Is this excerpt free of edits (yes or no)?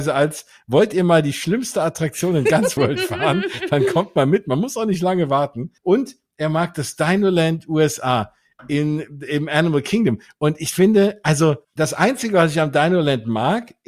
no